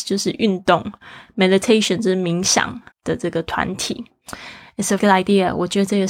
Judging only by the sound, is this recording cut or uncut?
cut